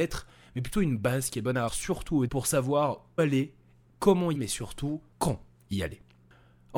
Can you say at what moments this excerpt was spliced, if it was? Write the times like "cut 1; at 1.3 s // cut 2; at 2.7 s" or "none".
cut 1; at 1.7 s // cut 2; at 2.3 s // cut 3; at 3.2 s // cut 4; at 4.3 s // cut 5; at 5.1 s